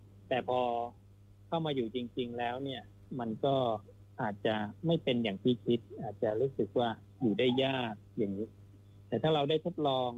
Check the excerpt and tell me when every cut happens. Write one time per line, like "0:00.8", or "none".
none